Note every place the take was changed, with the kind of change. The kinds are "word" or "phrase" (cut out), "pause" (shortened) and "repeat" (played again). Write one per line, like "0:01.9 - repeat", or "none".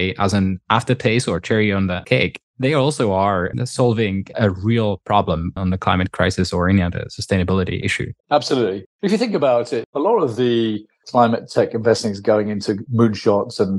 0:02.5 - pause
0:08.2 - pause